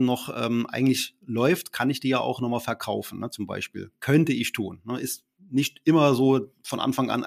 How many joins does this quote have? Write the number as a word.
zero